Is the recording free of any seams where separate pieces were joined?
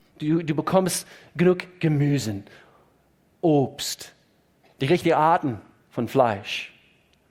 yes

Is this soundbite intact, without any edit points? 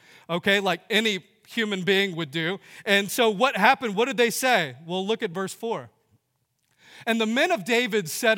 yes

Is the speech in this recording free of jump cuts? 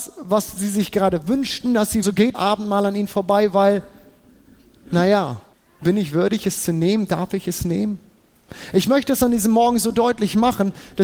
no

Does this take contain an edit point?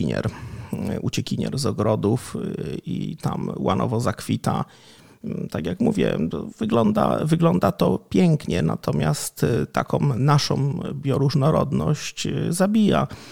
no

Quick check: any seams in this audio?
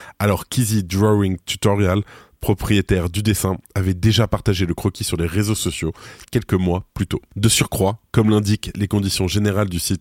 no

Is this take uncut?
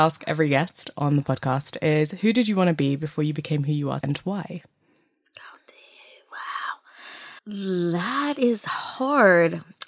no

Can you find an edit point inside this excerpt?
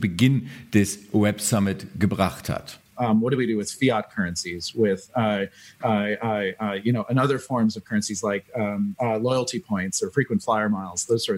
no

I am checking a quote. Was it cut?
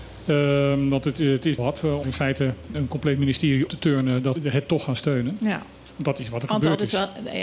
yes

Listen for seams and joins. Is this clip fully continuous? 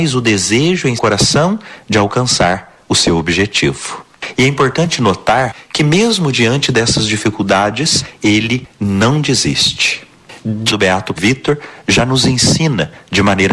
no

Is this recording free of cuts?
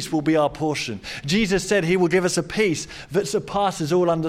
yes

